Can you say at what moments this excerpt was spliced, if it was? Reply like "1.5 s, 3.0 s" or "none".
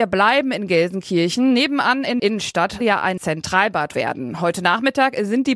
2.2 s, 2.8 s, 3.2 s, 3.9 s